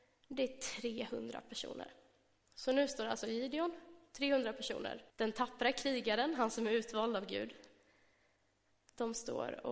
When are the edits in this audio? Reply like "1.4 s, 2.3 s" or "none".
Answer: 5.1 s